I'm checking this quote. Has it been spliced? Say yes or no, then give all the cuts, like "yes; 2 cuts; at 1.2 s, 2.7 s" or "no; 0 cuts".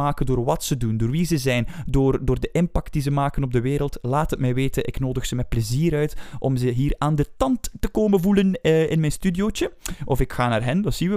no; 0 cuts